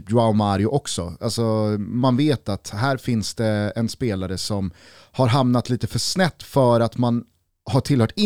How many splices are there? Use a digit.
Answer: 0